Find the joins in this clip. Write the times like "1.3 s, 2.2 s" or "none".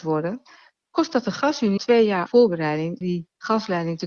1.8 s, 2.3 s, 3.0 s